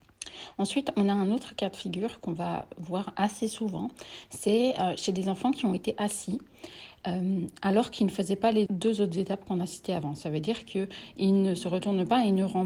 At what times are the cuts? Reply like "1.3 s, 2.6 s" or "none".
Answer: 8.7 s